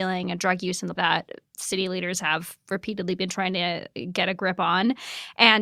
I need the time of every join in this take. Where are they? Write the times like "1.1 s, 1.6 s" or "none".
1.0 s

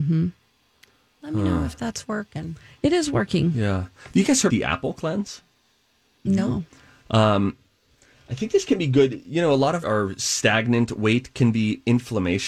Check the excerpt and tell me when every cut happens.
4.5 s, 9.8 s

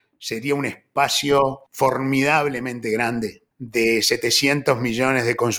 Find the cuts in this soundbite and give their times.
1.7 s, 3.5 s

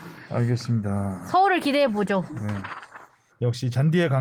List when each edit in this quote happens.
none

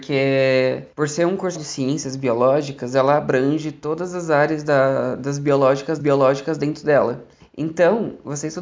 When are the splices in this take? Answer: 0.9 s, 1.5 s, 6.0 s, 7.4 s

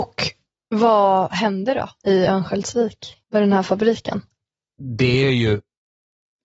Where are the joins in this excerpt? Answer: 3.2 s

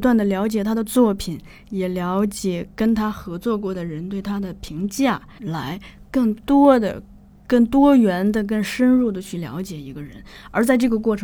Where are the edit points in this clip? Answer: 5.4 s

